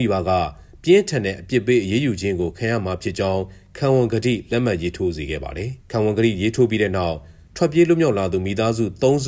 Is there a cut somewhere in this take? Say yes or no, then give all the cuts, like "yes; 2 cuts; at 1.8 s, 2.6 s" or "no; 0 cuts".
yes; 1 cut; at 5.8 s